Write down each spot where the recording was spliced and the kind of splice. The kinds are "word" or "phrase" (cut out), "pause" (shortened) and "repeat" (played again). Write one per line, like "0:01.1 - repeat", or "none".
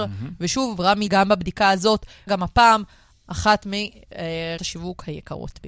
0:01.1 - word
0:02.3 - phrase
0:04.6 - word